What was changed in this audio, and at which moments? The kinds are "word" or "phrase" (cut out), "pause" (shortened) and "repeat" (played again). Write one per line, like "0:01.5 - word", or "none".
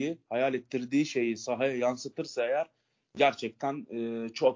none